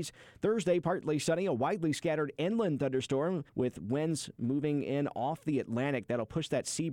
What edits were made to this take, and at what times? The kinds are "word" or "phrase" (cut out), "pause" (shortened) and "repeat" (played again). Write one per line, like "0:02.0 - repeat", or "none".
0:03.5 - pause